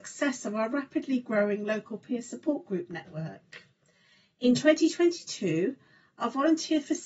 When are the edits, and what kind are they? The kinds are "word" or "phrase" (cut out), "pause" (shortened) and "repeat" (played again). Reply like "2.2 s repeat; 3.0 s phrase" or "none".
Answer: none